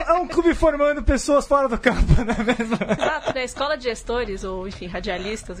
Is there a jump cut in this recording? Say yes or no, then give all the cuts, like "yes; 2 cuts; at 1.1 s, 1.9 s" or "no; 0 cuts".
yes; 1 cut; at 3.0 s